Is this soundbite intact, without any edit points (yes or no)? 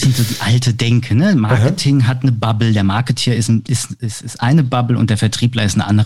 yes